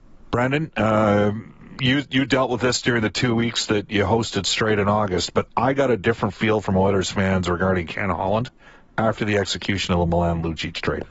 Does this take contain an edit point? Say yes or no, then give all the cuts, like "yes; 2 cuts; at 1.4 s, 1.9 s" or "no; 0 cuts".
no; 0 cuts